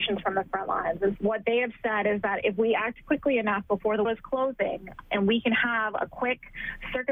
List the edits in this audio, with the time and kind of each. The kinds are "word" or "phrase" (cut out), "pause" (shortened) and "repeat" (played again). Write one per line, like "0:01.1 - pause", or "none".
0:01.2 - word
0:04.0 - word
0:05.0 - word

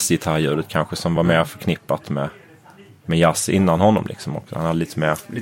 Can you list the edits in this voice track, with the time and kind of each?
none

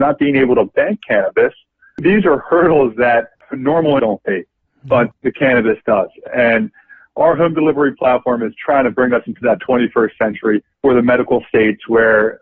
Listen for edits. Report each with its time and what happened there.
0:04.0 - word
0:10.7 - pause

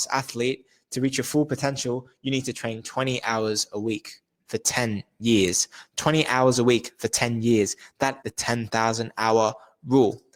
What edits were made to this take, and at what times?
0:08.2 - word

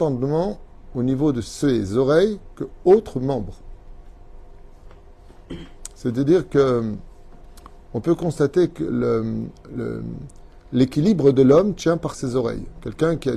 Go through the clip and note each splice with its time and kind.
none

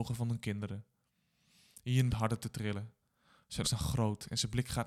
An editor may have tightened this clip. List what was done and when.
0:02.1 - word
0:03.6 - word

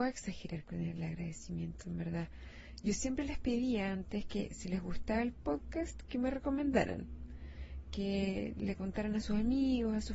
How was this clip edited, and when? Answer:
none

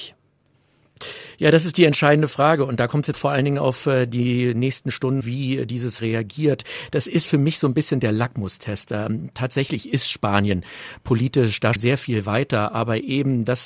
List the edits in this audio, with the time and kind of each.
0:03.1 - word
0:05.2 - phrase
0:06.0 - word
0:11.8 - word

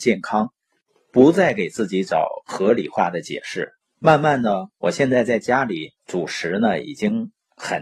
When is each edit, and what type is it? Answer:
0:03.8 - pause
0:06.0 - pause

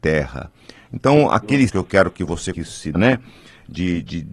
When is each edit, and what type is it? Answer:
0:01.7 - word
0:02.5 - phrase
0:02.9 - word

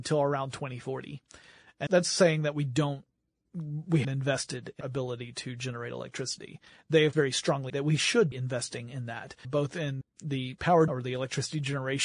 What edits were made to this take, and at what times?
0:01.9 - word
0:04.0 - word
0:04.8 - word
0:07.1 - word
0:07.7 - word
0:08.3 - word
0:09.4 - word
0:10.0 - word
0:10.9 - word

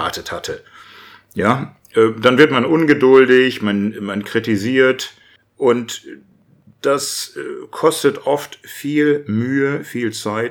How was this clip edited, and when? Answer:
0:05.4 - pause

